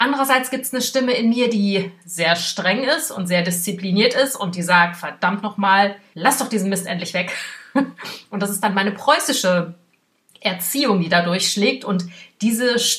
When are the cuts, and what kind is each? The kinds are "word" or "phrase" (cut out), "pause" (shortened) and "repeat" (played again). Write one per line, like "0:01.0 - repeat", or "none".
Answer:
none

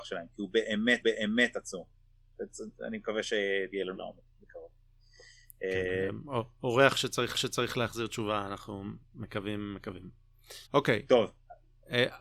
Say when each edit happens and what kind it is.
0:01.0 - repeat
0:03.9 - phrase
0:04.3 - pause
0:07.3 - repeat
0:10.7 - pause

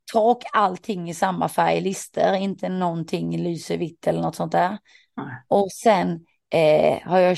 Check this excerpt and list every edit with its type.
none

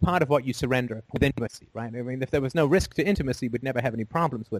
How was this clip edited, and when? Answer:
0:01.1 - pause

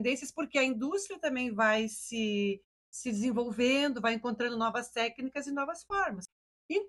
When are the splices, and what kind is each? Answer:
none

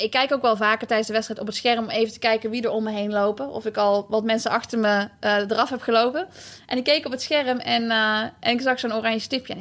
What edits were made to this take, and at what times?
none

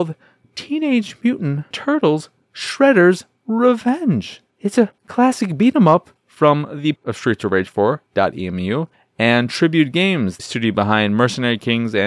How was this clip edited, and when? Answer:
0:01.7 - word
0:04.5 - pause
0:05.0 - pause
0:06.2 - pause
0:07.0 - word
0:08.9 - pause
0:10.4 - word

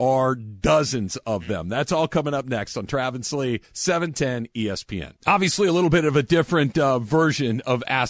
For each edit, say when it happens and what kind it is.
0:03.6 - pause
0:05.2 - pause

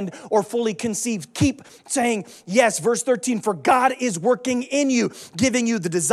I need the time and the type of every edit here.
none

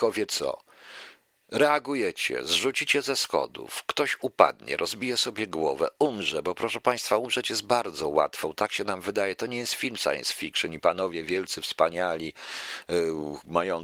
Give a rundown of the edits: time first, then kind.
none

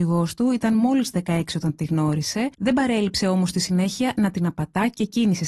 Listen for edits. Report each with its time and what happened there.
0:02.5 - pause

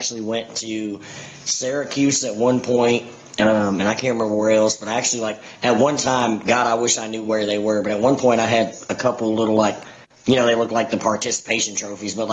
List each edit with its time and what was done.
none

